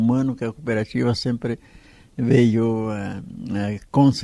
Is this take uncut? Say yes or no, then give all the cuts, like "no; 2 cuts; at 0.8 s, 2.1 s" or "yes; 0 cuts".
yes; 0 cuts